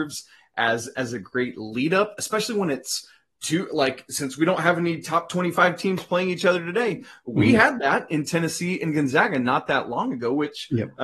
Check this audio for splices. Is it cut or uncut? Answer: uncut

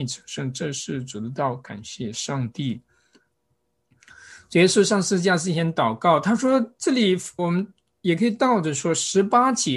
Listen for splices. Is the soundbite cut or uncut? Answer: cut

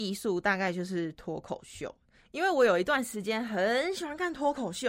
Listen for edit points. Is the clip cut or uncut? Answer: uncut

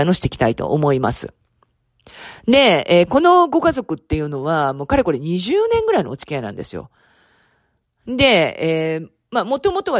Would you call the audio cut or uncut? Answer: uncut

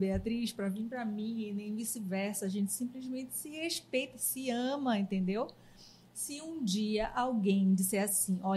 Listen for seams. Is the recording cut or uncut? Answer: uncut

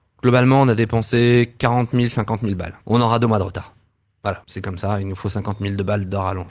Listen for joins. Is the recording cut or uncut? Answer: cut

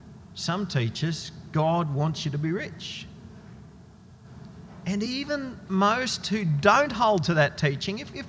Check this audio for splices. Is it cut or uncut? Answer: uncut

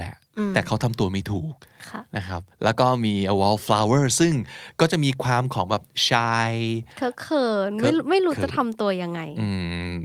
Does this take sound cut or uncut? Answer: cut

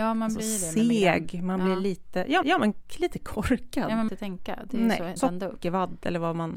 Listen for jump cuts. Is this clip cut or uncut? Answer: cut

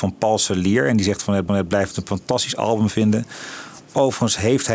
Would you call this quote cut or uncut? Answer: cut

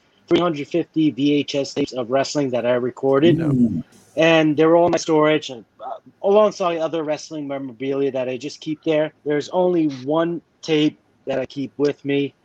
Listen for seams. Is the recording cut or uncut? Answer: cut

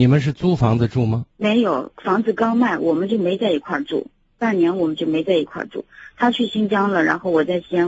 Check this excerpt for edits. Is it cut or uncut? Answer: cut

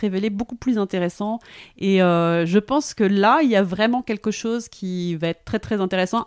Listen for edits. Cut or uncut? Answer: uncut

